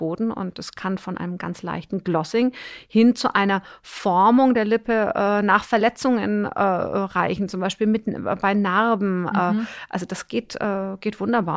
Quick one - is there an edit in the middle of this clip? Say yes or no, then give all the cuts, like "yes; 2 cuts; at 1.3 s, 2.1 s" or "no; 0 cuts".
no; 0 cuts